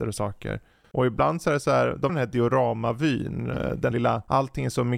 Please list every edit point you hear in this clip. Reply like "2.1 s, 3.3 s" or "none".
2.1 s, 3.9 s